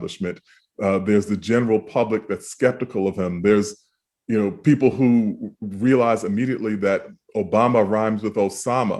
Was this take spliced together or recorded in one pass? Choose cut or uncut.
uncut